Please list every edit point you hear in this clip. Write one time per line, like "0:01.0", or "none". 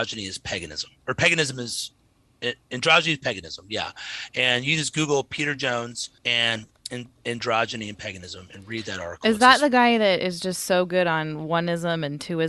0:06.2